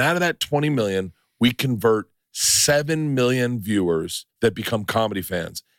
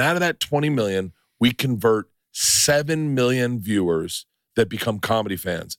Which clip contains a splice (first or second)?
first